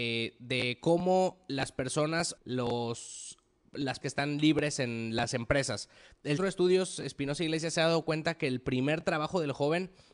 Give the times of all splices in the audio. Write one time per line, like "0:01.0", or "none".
0:02.4
0:04.0
0:06.4